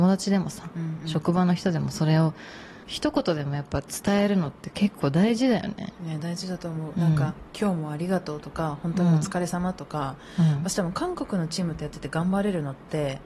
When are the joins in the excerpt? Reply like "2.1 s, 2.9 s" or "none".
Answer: 2.8 s